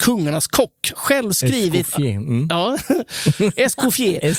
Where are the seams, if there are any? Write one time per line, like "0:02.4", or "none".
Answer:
0:00.9